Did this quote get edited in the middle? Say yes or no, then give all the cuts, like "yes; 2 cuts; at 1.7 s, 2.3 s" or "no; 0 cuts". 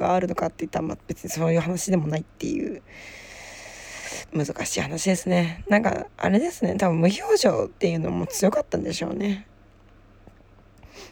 yes; 2 cuts; at 6.1 s, 7.8 s